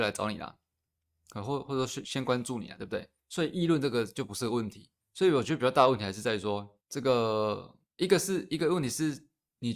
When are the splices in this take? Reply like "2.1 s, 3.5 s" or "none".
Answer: 3.2 s, 5.0 s, 6.8 s, 7.9 s